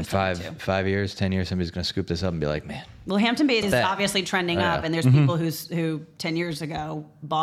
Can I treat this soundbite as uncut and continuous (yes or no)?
no